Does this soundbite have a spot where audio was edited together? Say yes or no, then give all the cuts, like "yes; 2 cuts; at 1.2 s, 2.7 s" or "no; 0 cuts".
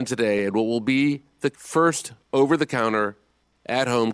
yes; 1 cut; at 1.5 s